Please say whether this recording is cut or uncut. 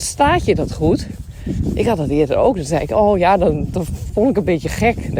uncut